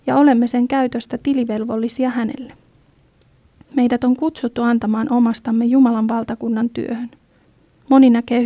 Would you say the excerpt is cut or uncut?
uncut